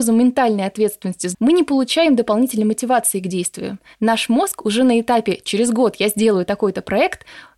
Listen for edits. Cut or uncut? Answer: cut